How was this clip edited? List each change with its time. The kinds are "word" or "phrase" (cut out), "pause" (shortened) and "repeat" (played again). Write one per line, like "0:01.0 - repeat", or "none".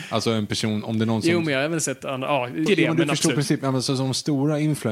0:02.7 - phrase